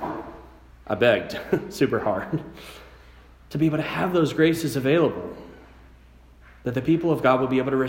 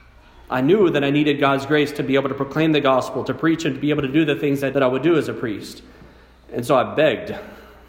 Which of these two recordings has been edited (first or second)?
second